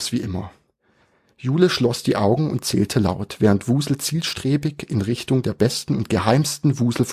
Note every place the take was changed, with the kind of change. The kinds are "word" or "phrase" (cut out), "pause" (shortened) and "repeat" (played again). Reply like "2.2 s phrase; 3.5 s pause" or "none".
none

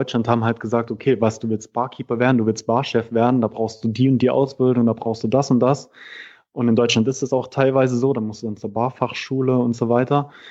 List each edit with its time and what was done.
none

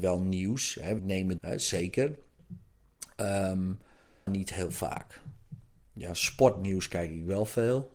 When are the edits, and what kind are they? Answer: 1.0 s word; 1.4 s word; 4.3 s word

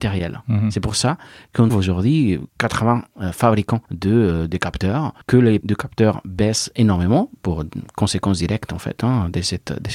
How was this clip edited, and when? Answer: 1.7 s word; 2.5 s pause; 3.9 s pause; 5.2 s pause; 5.6 s word

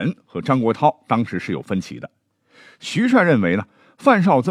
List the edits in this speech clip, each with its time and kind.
none

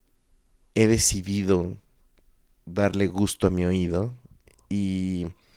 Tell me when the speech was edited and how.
none

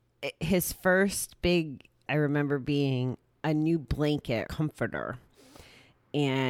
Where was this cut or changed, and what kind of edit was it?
2.1 s word; 4.5 s word

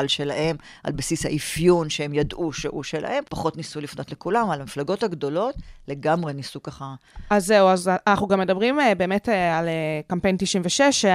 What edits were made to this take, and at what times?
3.3 s pause

